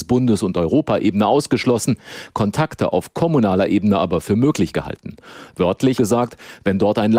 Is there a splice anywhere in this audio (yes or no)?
yes